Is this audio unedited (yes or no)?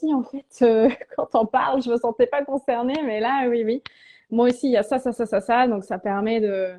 yes